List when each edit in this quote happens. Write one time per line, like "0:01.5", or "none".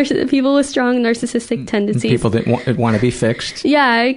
none